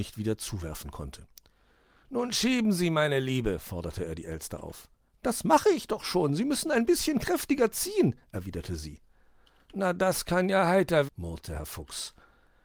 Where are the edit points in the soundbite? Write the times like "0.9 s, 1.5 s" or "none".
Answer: 11.1 s